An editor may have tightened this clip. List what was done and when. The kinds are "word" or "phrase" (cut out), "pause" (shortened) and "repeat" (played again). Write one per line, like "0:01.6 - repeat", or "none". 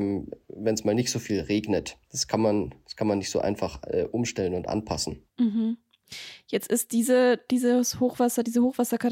0:02.0 - pause
0:05.3 - pause

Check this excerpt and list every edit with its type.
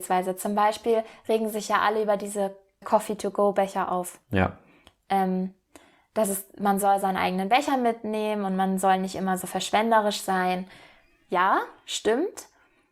0:02.8 - word

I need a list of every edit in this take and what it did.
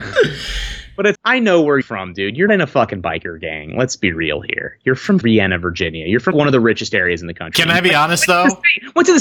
0:01.1 - word
0:01.8 - word
0:02.5 - word
0:05.2 - word
0:06.3 - word

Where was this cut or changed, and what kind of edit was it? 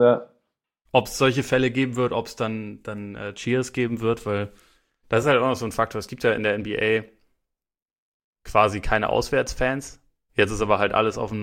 none

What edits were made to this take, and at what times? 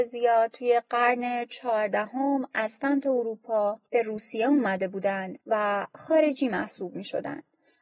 0:03.9 - pause
0:05.4 - pause

